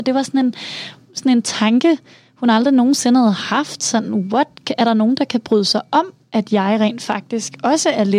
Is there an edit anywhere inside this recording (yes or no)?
no